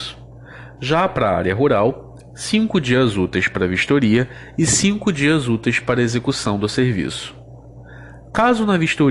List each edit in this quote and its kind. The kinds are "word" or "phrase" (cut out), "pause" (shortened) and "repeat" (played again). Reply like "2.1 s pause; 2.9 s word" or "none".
none